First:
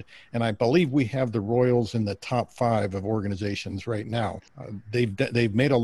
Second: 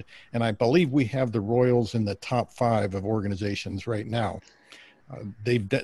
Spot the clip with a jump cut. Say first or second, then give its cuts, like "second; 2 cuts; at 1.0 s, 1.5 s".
first; 1 cut; at 4.5 s